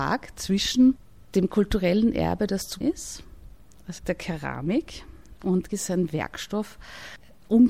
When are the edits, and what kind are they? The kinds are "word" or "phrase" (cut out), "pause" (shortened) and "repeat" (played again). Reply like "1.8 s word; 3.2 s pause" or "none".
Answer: 2.8 s word; 4.0 s word; 5.7 s word